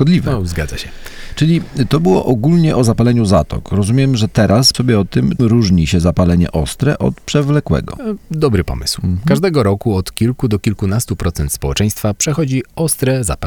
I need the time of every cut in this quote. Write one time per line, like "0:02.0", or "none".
0:04.7
0:05.4